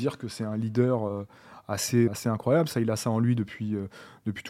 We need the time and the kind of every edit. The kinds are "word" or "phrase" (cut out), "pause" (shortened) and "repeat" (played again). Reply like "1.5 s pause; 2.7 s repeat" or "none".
2.1 s word